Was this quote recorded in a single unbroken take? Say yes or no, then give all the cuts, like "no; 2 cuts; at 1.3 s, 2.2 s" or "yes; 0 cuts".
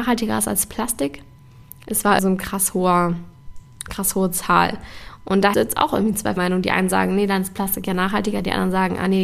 no; 3 cuts; at 2.2 s, 5.5 s, 6.4 s